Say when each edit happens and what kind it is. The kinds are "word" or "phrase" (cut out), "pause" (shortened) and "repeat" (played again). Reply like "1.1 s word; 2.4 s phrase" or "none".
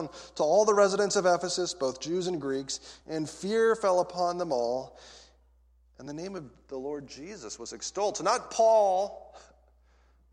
none